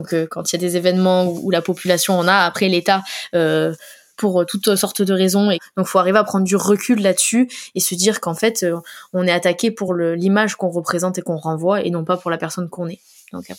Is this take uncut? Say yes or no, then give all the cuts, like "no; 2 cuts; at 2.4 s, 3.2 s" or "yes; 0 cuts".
yes; 0 cuts